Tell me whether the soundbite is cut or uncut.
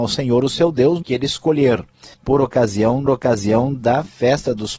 cut